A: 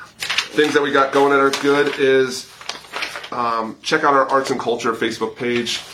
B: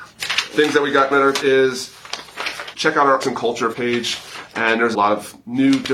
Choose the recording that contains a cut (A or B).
B